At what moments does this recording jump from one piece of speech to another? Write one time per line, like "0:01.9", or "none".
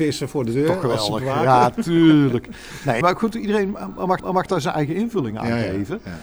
0:03.0
0:04.2